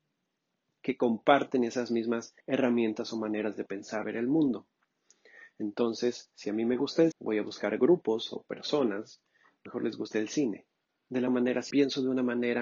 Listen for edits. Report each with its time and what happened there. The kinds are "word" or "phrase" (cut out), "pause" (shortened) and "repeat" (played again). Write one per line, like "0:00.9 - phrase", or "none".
0:02.4 - pause
0:04.0 - phrase
0:07.1 - word
0:09.7 - phrase
0:10.7 - pause
0:11.3 - word
0:11.7 - word